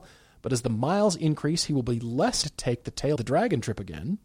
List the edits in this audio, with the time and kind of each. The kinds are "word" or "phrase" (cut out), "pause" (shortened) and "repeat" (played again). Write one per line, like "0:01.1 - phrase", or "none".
0:02.4 - word
0:03.2 - word